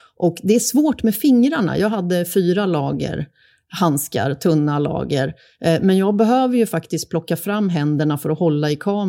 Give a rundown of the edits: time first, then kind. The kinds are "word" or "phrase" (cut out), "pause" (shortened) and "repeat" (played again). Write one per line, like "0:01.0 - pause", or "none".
none